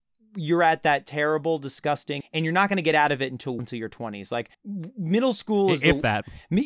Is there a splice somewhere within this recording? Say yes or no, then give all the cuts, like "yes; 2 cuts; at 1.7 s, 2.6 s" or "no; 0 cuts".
yes; 3 cuts; at 2.2 s, 3.6 s, 4.5 s